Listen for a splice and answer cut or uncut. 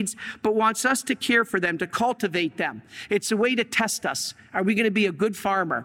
uncut